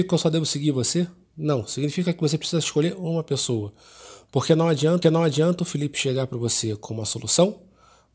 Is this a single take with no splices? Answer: no; 1 cut; at 5.0 s

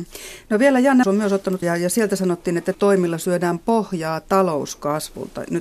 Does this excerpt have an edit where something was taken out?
yes; 3 cuts; at 1.0 s, 1.6 s, 2.7 s

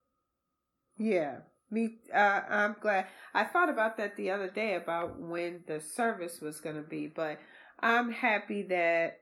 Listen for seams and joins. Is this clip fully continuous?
yes; 0 cuts

